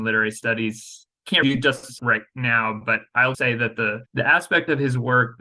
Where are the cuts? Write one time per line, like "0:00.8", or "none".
0:01.4
0:02.0
0:03.3
0:04.1